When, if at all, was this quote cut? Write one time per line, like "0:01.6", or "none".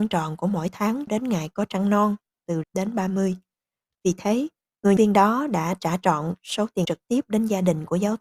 0:01.1
0:02.6
0:05.0
0:06.8